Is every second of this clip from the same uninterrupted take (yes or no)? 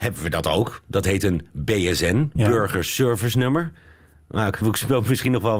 no